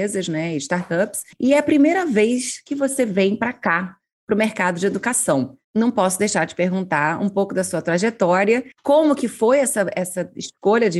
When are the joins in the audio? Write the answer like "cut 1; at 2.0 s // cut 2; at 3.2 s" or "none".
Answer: cut 1; at 1.3 s // cut 2; at 5.6 s // cut 3; at 8.7 s